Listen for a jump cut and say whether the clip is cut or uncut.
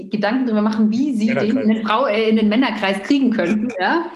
uncut